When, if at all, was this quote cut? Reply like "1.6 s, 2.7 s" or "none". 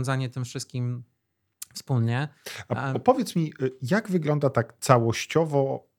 none